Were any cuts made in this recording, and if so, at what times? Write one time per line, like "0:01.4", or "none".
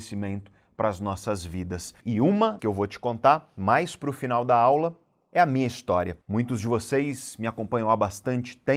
0:02.0
0:02.6
0:06.2